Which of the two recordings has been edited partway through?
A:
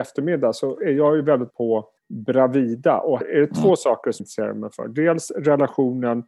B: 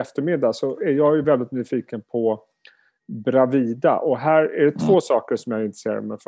A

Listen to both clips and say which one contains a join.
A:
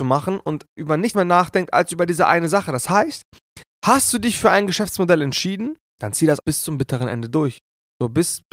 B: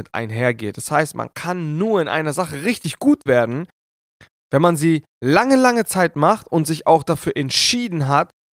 A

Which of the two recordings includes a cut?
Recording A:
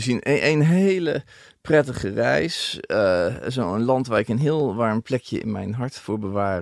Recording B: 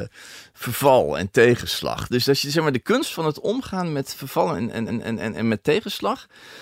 B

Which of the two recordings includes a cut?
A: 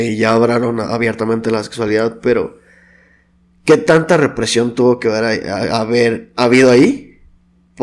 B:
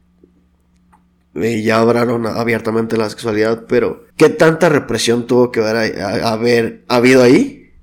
B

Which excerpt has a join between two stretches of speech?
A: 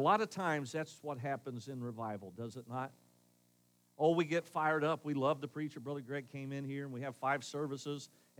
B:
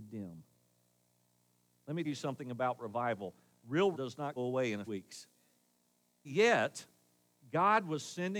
B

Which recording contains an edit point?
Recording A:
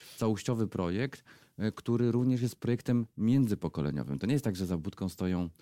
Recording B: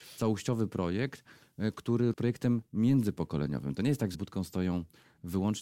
B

